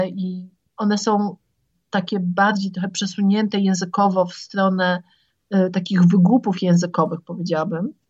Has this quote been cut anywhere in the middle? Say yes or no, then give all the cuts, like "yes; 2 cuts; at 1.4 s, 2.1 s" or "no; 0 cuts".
no; 0 cuts